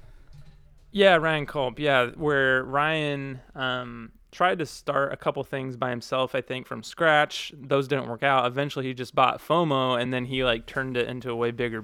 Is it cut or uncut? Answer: uncut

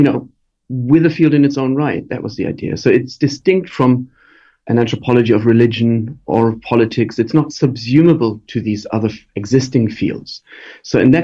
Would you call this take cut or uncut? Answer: uncut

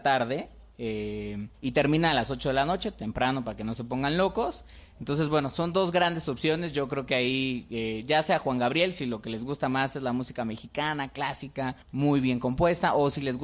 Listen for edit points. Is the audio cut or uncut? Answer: cut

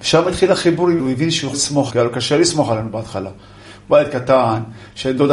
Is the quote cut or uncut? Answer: cut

